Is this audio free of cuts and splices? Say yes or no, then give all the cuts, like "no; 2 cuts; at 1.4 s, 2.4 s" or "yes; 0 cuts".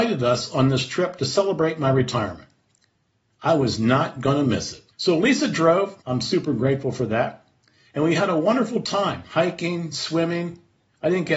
no; 2 cuts; at 4.9 s, 6.0 s